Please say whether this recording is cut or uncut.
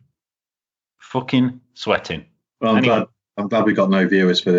uncut